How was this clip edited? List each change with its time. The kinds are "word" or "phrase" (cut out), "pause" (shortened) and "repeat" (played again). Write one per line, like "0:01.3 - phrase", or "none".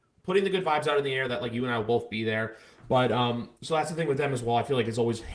0:03.6 - pause